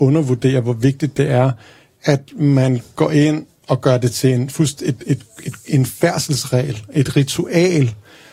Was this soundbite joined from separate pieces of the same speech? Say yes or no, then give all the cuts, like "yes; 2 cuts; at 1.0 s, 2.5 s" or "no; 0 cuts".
no; 0 cuts